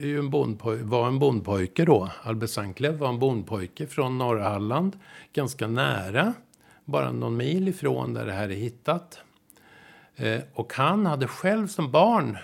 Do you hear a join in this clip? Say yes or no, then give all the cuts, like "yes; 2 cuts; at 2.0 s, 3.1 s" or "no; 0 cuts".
no; 0 cuts